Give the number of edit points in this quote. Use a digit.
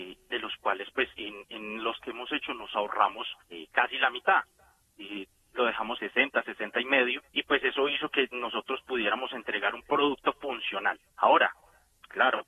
6